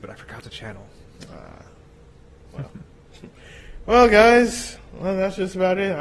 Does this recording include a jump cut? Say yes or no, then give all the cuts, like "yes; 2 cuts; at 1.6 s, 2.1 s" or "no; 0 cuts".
no; 0 cuts